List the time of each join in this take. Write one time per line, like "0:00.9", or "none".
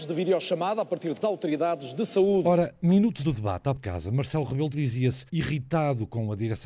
0:01.2
0:03.2
0:03.8
0:04.7
0:05.3